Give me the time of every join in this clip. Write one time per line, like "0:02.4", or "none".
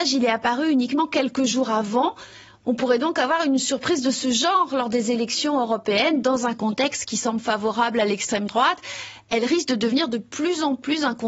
none